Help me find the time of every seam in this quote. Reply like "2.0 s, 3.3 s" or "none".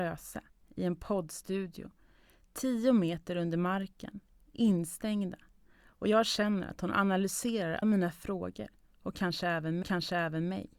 7.8 s, 9.8 s